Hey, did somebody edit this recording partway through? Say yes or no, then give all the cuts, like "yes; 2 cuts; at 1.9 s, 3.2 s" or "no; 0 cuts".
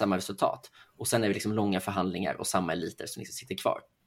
no; 0 cuts